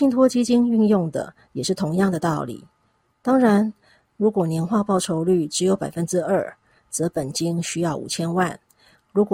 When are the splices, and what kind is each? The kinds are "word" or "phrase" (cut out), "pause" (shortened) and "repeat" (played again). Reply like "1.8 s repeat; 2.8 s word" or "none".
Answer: none